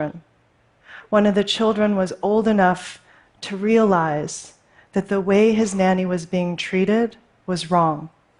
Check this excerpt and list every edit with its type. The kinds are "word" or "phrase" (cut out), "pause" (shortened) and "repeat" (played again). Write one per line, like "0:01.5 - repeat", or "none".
none